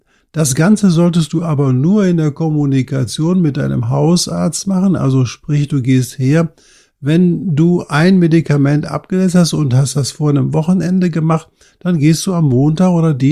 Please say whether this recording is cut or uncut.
uncut